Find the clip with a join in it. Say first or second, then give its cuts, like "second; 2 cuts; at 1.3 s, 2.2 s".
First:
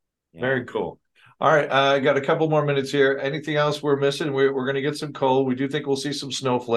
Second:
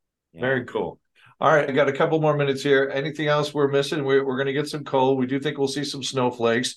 second; 1 cut; at 1.7 s